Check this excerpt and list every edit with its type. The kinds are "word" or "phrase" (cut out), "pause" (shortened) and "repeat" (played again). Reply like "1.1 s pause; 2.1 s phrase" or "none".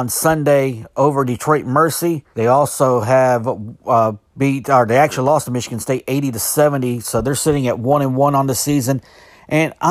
2.3 s pause